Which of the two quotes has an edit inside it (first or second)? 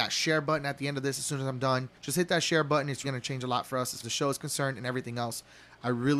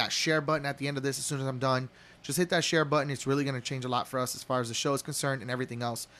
first